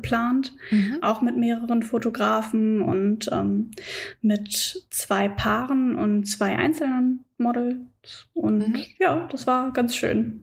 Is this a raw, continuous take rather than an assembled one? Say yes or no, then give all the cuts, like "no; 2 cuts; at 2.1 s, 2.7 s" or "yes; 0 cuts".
yes; 0 cuts